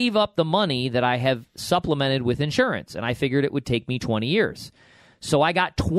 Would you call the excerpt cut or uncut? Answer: uncut